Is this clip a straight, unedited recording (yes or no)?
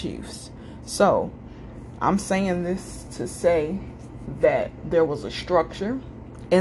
yes